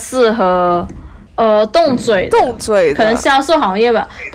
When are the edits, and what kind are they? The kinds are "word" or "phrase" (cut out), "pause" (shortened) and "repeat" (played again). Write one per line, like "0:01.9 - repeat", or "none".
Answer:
0:01.3 - pause